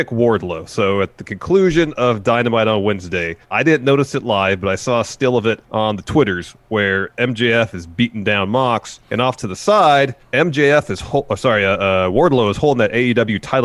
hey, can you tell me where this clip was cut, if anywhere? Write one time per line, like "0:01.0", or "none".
0:03.4
0:05.6
0:09.0
0:10.2